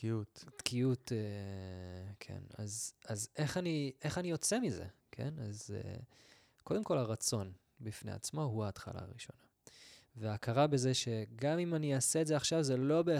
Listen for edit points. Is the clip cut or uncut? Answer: cut